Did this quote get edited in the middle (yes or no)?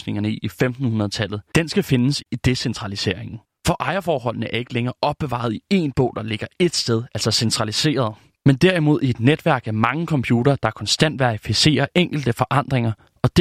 no